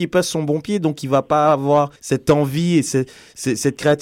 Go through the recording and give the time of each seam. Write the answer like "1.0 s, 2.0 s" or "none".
2.0 s